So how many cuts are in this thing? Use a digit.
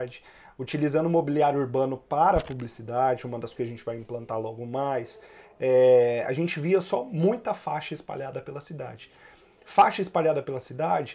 1